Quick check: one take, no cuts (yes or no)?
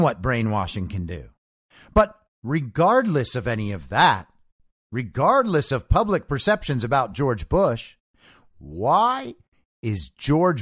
yes